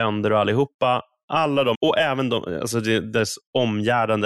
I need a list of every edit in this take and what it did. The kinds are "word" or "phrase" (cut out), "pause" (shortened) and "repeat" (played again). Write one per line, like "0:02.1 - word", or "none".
0:01.7 - word